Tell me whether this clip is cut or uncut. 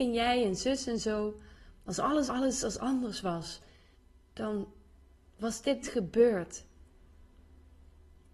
cut